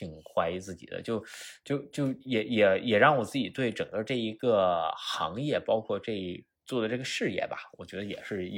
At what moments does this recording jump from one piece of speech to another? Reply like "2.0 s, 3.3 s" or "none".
2.2 s